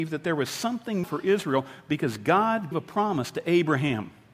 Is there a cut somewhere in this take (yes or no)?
yes